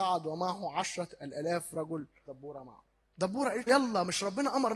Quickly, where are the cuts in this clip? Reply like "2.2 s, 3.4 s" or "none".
2.3 s, 3.0 s, 3.7 s